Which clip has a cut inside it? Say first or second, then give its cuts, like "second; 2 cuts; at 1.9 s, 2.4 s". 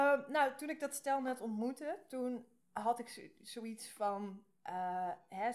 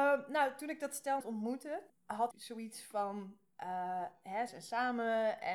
second; 4 cuts; at 1.2 s, 1.9 s, 2.3 s, 4.5 s